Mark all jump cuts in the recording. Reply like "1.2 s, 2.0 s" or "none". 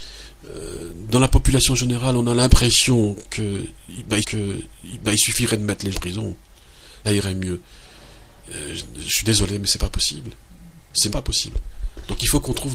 4.2 s, 5.9 s, 7.0 s, 11.1 s